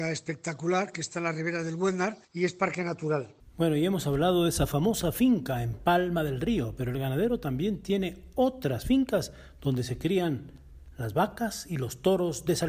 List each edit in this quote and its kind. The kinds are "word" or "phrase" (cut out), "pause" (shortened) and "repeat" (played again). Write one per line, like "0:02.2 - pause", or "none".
0:02.2 - pause
0:03.4 - pause